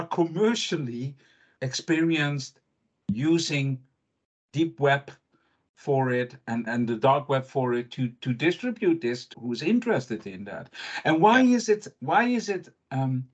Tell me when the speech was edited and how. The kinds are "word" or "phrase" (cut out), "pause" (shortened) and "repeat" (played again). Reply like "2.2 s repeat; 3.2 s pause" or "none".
1.6 s word; 6.7 s word; 9.3 s word